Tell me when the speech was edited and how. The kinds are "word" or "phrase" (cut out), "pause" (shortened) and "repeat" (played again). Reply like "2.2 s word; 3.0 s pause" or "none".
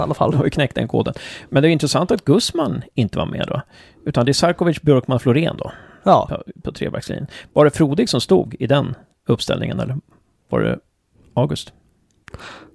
none